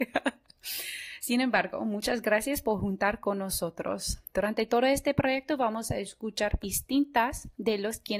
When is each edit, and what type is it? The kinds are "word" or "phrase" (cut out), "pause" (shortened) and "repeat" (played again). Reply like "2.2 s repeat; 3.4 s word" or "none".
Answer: 6.6 s word